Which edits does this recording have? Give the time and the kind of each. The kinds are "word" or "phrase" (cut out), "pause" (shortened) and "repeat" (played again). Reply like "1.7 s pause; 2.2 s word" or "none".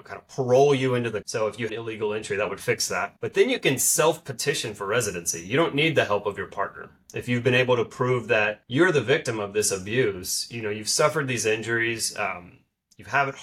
1.2 s word; 1.7 s phrase; 3.2 s pause; 8.6 s pause

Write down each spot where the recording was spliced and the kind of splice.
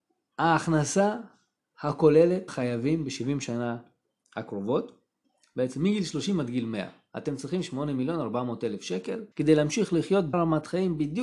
2.5 s word; 5.2 s pause; 9.3 s pause; 10.3 s word

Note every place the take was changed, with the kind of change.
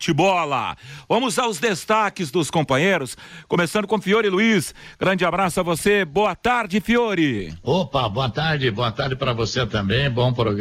none

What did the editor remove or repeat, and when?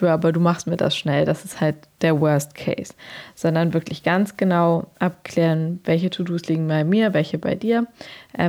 none

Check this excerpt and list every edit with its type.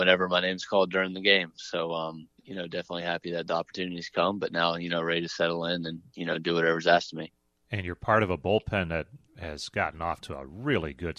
2.3 s pause; 7.5 s pause

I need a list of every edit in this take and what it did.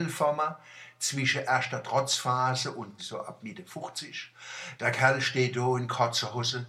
3.0 s phrase

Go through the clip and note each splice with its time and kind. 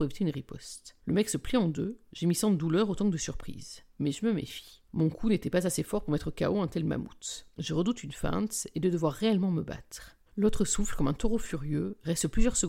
1.0 s pause; 3.9 s pause; 4.9 s pause; 7.5 s pause; 10.3 s pause

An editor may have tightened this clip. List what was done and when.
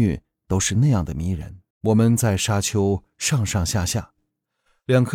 1.7 s pause

